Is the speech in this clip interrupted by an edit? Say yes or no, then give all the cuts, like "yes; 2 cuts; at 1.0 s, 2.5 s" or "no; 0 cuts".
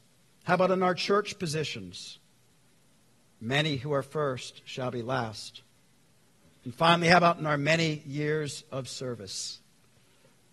no; 0 cuts